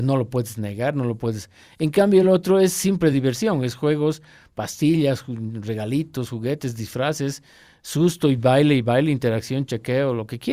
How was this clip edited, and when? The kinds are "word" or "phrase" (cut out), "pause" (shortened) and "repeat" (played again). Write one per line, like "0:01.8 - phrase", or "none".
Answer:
none